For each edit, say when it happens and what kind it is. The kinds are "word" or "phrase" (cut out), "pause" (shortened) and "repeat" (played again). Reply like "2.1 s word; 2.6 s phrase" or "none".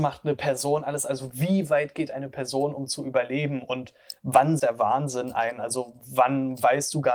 4.6 s word

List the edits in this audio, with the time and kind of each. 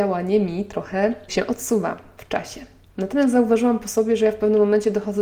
1.3 s word

